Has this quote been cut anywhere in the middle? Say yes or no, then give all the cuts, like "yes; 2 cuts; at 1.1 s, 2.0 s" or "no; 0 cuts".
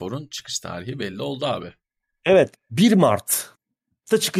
no; 0 cuts